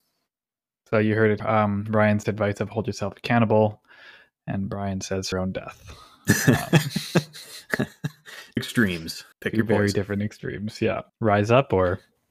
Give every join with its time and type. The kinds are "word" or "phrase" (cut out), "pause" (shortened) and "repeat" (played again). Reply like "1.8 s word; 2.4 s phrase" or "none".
1.4 s word; 2.2 s word; 5.3 s phrase; 8.6 s word; 9.3 s pause; 11.1 s pause